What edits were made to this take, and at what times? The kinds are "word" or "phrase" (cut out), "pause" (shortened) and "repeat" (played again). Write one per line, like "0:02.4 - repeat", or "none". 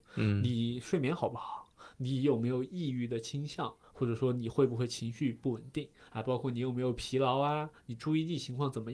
none

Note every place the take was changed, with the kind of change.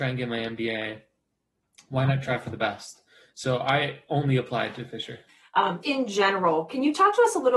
0:05.8 - word

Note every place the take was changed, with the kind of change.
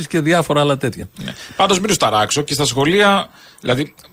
none

